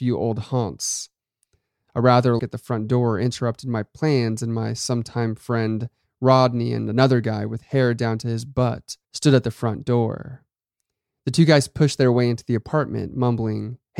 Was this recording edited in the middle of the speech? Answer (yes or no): yes